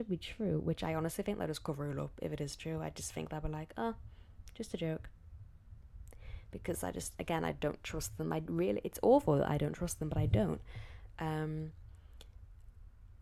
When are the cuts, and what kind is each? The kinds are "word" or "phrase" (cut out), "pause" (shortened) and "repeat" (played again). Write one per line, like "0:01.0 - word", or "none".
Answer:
none